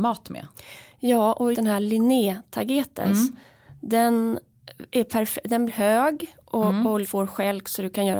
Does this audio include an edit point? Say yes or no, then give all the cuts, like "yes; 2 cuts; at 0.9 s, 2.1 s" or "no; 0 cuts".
yes; 3 cuts; at 1.5 s, 5.7 s, 7.0 s